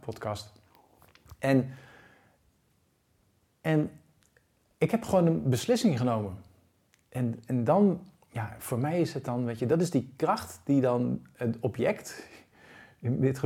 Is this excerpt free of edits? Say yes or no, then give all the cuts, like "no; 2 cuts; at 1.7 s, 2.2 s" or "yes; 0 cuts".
yes; 0 cuts